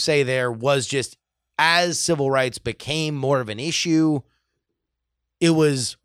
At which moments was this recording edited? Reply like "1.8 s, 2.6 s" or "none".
none